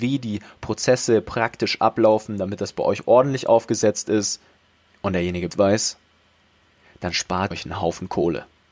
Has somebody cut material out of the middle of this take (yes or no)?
yes